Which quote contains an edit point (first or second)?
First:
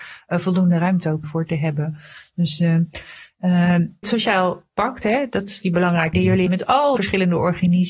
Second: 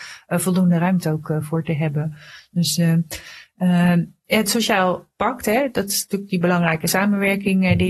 first